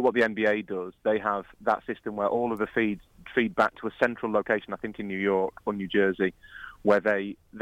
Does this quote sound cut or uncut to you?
uncut